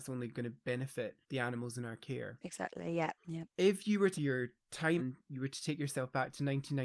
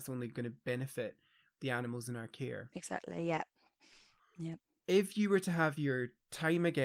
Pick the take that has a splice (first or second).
first